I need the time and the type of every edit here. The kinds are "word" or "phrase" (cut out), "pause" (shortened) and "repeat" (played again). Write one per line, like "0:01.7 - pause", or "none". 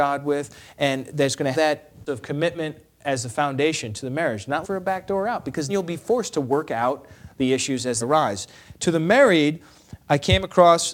0:01.5 - word
0:02.1 - word
0:04.6 - word
0:05.7 - word
0:08.0 - word